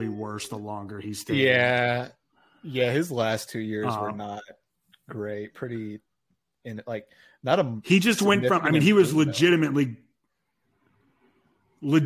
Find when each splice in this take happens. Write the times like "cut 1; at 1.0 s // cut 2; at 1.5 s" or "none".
none